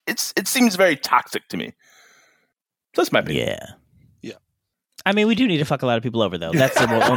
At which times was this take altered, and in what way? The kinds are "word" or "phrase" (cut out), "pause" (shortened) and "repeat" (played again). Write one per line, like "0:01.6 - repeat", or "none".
none